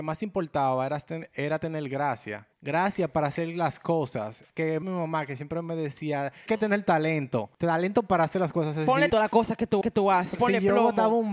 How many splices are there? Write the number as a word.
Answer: eight